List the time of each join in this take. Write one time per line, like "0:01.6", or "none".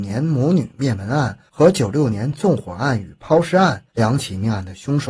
0:03.9